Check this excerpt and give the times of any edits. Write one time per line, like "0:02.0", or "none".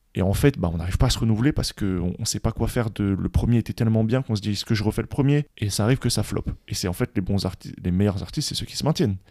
none